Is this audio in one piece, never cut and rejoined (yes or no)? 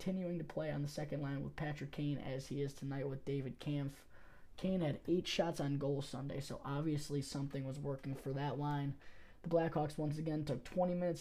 yes